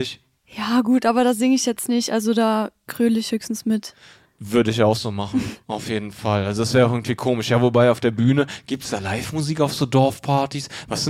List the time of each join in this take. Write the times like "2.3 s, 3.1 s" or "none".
none